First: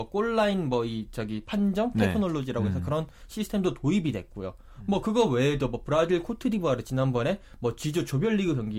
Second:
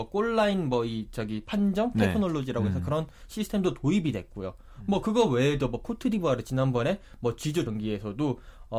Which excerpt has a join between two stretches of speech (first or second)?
second